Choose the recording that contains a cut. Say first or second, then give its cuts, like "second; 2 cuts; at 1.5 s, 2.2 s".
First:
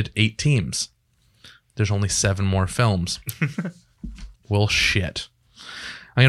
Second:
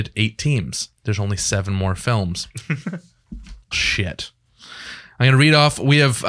second; 2 cuts; at 1.0 s, 3.7 s